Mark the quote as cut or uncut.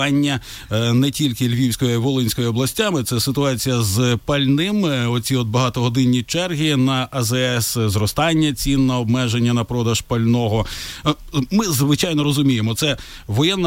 uncut